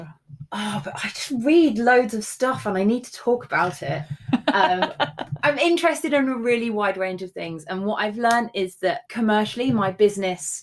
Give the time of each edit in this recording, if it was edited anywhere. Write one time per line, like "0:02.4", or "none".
0:09.1